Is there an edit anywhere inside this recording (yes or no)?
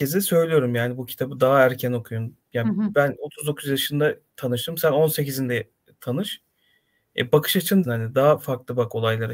yes